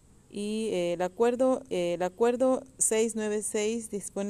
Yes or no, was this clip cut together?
yes